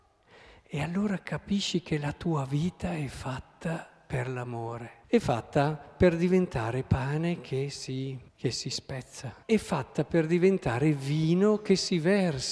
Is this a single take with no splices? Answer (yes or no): no